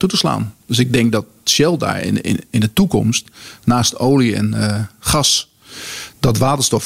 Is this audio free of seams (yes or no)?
yes